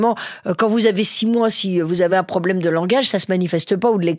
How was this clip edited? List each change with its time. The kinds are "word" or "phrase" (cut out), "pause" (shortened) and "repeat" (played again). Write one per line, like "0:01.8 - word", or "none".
none